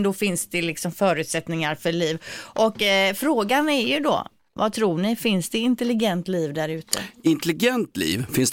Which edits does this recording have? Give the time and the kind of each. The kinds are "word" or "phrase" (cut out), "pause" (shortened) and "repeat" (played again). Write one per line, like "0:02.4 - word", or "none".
none